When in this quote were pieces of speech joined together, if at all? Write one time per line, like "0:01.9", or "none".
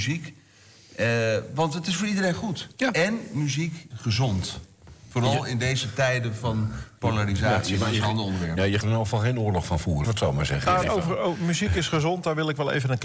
0:03.9
0:08.8
0:10.0
0:10.8